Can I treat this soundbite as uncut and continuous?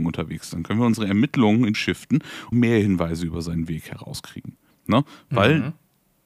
no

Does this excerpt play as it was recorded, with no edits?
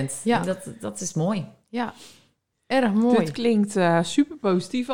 yes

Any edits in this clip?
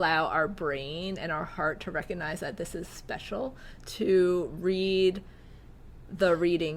no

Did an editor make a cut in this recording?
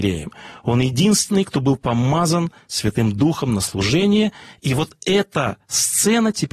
no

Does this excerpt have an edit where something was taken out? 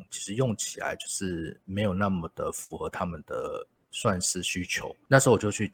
no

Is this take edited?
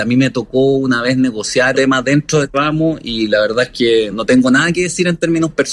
yes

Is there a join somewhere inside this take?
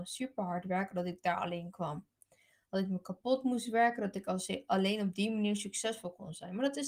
no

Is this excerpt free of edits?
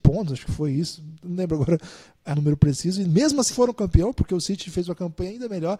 no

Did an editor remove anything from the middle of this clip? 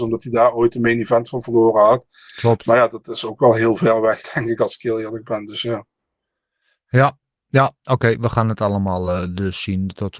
no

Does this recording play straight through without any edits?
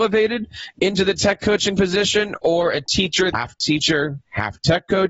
no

